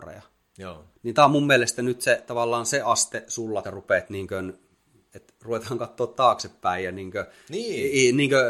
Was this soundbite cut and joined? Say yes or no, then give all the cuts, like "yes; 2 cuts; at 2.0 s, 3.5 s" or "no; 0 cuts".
yes; 2 cuts; at 0.9 s, 3.6 s